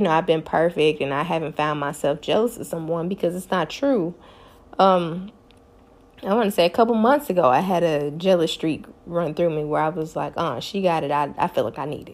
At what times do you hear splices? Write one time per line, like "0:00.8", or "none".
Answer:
none